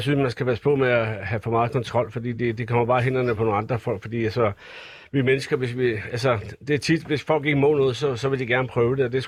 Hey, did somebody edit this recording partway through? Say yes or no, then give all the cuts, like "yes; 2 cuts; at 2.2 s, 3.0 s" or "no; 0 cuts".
no; 0 cuts